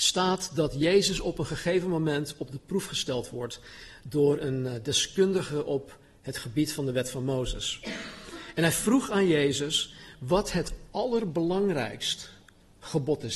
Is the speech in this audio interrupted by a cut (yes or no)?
no